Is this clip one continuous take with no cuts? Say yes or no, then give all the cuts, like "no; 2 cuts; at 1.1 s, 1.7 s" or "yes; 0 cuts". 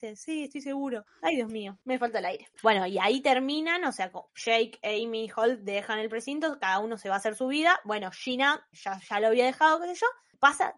no; 3 cuts; at 1.8 s, 4.3 s, 8.7 s